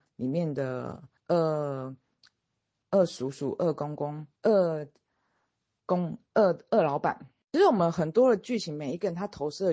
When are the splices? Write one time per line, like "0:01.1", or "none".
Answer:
0:01.2
0:04.4